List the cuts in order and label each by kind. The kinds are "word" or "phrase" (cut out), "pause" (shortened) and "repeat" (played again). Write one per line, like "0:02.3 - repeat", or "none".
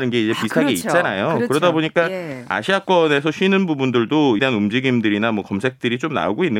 0:04.4 - phrase